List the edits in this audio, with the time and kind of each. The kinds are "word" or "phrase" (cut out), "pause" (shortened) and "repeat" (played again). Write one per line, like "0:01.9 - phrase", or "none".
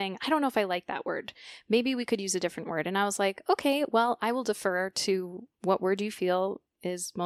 0:05.5 - pause